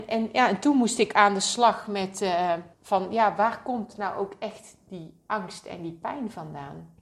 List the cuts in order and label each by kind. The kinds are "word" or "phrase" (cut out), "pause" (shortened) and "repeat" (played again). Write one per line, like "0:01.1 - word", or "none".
0:02.7 - pause